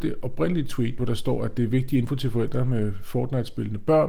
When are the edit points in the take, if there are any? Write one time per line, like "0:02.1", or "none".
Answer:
none

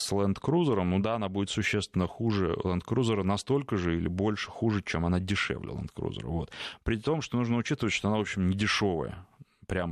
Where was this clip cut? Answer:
none

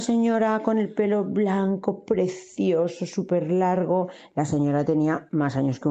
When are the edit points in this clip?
none

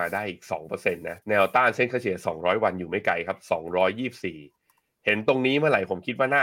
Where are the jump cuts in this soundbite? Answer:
0:01.2

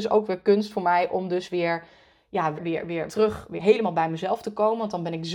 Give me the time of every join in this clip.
0:02.5
0:03.1
0:03.6

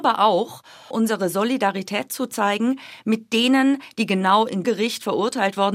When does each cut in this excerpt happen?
0:00.9
0:04.6

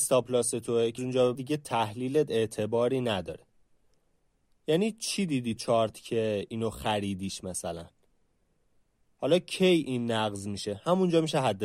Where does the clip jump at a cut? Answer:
0:01.0
0:01.3
0:05.6

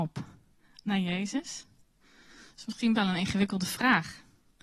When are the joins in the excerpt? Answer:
0:02.9

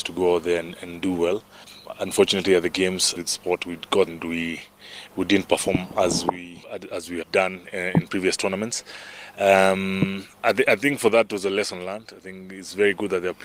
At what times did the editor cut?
0:03.2
0:04.1
0:07.2
0:10.3

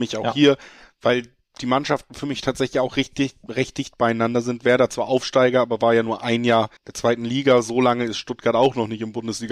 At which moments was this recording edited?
0:06.8

